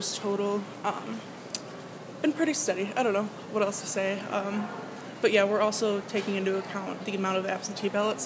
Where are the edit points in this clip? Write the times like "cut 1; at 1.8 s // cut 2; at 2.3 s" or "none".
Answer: cut 1; at 7.0 s